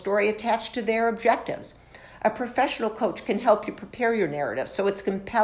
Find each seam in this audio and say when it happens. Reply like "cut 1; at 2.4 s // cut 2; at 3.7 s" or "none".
none